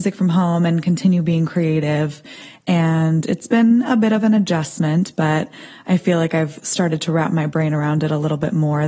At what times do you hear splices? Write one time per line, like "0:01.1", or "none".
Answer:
none